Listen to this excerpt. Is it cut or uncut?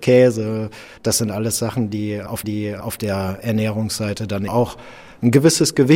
cut